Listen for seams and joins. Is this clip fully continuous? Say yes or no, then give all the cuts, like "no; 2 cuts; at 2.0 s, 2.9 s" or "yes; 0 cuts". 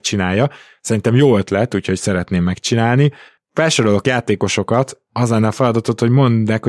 yes; 0 cuts